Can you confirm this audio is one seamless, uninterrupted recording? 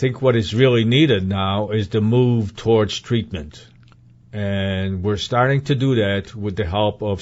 yes; 0 cuts

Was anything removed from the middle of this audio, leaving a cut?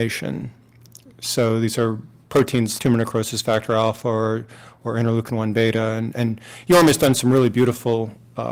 yes; 1 cut; at 2.8 s

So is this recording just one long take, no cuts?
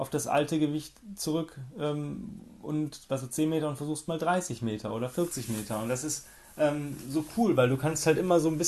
yes; 0 cuts

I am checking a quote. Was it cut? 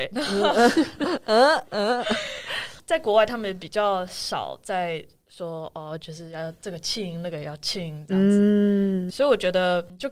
yes; 1 cut; at 9.1 s

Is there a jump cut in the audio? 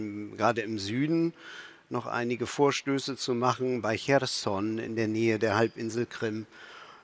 no; 0 cuts

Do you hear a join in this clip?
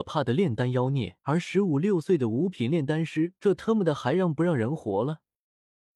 yes; 2 cuts; at 1.2 s, 3.4 s

